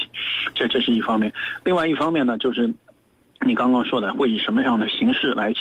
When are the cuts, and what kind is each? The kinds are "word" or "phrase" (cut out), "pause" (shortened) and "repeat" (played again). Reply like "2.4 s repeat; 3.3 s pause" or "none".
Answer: none

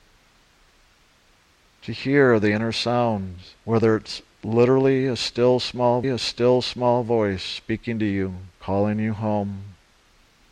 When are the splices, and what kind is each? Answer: 3.6 s pause; 6.0 s repeat; 8.5 s pause

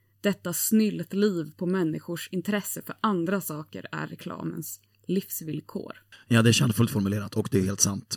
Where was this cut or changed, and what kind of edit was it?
none

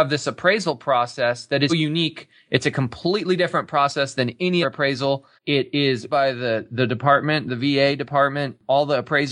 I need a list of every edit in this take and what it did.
1.7 s word; 4.6 s word; 5.4 s pause; 6.1 s word

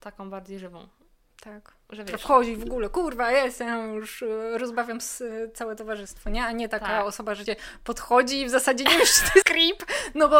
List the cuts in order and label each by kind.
7.5 s word; 9.4 s word

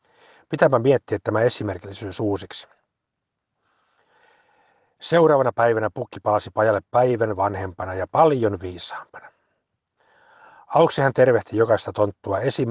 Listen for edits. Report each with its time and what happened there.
none

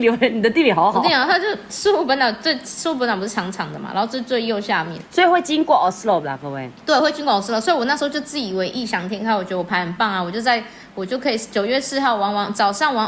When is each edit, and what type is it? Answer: none

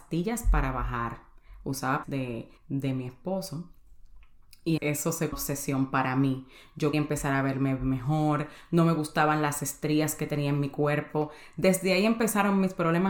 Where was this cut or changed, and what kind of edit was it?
2.0 s phrase; 2.6 s pause; 4.8 s word; 5.3 s phrase; 6.9 s word

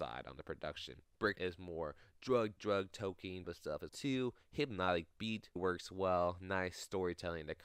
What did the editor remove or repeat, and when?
1.3 s word; 2.6 s word; 3.4 s word; 3.9 s word; 5.6 s word

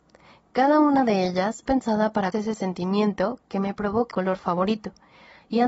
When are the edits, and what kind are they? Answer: 1.7 s word; 2.3 s word; 4.1 s word

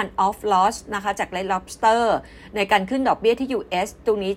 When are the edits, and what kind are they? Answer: none

